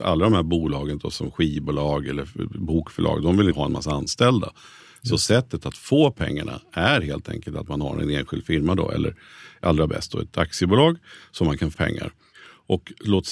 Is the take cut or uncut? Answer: cut